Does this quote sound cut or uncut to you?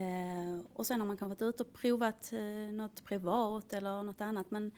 uncut